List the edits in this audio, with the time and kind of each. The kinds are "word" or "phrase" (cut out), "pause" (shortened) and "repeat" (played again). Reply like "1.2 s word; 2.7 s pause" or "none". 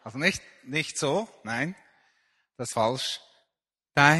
2.7 s word